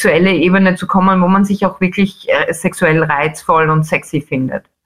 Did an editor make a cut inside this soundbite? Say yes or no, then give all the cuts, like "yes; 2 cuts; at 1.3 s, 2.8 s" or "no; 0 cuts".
no; 0 cuts